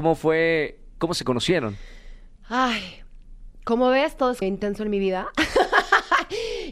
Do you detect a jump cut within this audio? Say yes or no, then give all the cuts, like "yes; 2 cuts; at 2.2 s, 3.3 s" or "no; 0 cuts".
yes; 2 cuts; at 2.4 s, 4.4 s